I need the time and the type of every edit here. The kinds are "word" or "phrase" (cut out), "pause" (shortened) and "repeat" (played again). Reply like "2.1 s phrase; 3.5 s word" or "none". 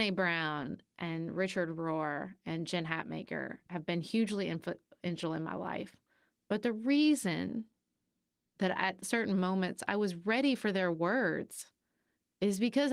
none